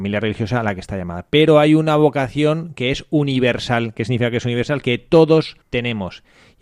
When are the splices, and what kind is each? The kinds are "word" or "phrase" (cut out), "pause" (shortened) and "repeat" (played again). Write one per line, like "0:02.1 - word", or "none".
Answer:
0:05.6 - pause